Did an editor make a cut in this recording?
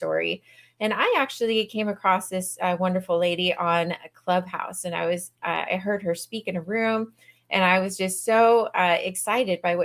no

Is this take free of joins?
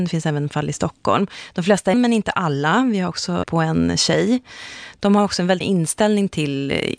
no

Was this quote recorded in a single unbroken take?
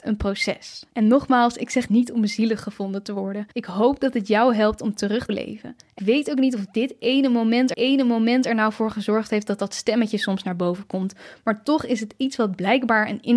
no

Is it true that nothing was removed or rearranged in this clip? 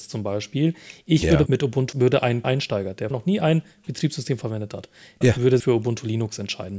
no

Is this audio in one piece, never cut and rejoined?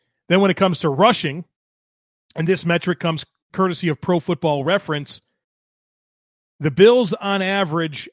yes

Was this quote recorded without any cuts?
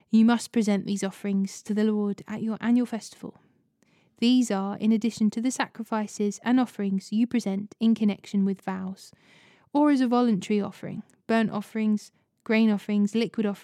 yes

